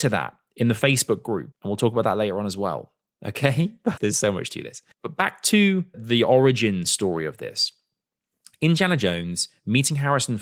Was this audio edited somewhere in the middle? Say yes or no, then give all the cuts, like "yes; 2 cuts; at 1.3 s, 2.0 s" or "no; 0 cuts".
yes; 4 cuts; at 1.5 s, 4.0 s, 4.9 s, 5.9 s